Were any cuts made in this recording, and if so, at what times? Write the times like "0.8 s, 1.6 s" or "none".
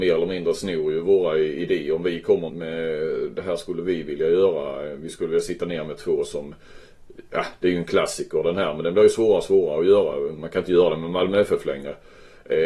2.5 s